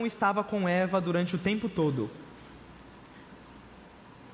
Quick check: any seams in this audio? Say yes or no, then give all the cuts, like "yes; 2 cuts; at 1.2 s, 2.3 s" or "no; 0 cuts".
no; 0 cuts